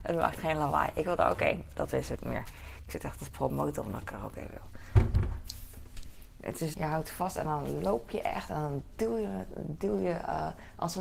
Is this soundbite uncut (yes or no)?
no